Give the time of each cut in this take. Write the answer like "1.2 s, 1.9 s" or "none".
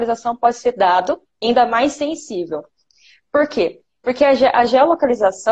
none